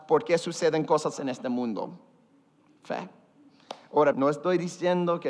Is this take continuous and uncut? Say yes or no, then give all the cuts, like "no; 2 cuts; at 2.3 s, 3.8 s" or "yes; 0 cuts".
no; 2 cuts; at 1.1 s, 4.1 s